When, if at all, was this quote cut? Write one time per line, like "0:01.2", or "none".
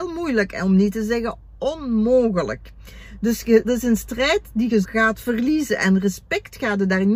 0:03.6
0:04.8